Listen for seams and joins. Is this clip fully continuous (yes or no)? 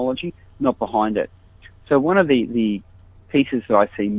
yes